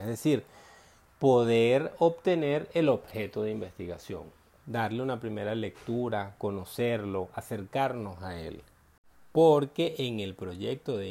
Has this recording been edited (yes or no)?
no